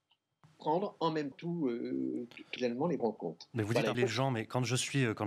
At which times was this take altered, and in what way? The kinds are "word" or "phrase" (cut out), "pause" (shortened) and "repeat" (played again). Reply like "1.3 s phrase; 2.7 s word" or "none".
1.3 s word; 2.6 s word; 3.0 s word; 3.9 s word